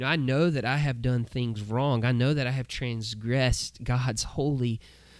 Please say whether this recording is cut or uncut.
uncut